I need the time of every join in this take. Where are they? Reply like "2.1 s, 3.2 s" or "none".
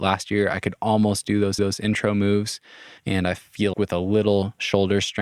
1.6 s, 3.0 s, 3.7 s